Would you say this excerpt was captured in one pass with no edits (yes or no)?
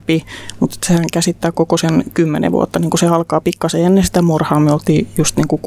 yes